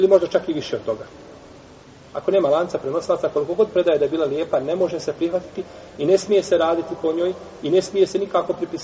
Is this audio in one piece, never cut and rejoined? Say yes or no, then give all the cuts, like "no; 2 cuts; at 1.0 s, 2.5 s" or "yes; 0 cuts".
yes; 0 cuts